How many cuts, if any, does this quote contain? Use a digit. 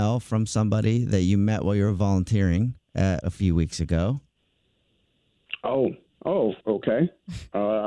2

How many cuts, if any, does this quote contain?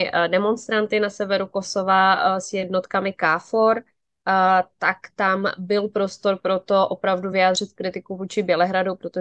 0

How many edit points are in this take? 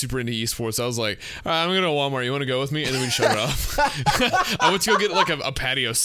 0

